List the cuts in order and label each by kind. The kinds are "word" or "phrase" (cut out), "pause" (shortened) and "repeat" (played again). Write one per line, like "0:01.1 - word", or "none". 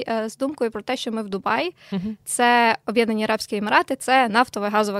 none